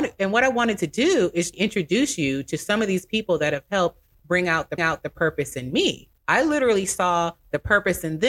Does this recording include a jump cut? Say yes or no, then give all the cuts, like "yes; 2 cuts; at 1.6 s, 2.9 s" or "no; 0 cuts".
yes; 3 cuts; at 1.5 s, 4.8 s, 6.2 s